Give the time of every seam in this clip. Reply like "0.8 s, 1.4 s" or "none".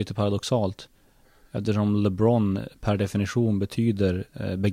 none